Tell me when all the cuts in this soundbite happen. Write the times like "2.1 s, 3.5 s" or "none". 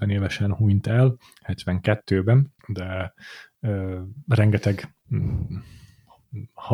2.6 s